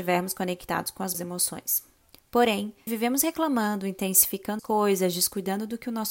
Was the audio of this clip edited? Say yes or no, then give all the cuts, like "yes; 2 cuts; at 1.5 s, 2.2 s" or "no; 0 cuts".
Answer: yes; 3 cuts; at 1.1 s, 2.9 s, 4.6 s